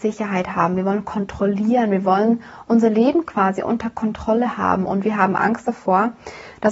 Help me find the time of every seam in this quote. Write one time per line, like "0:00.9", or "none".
none